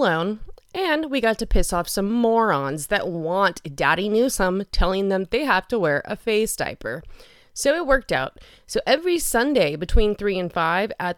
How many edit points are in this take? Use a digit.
0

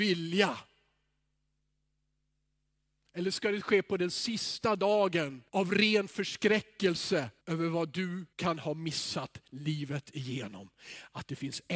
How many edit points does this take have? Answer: 3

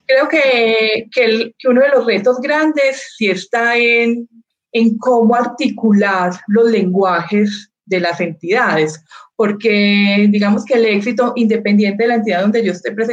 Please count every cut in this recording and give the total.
0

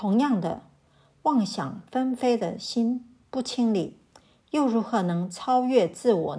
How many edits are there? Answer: 0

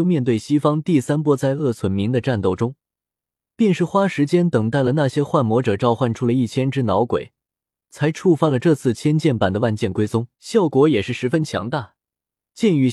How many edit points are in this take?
1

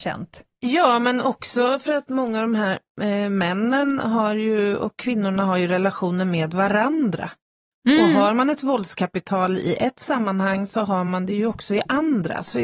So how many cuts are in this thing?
0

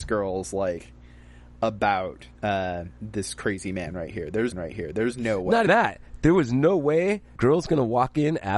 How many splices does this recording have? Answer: 4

